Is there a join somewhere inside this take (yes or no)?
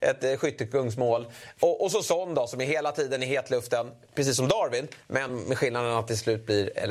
no